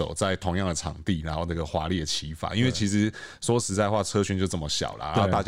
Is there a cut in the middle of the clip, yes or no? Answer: no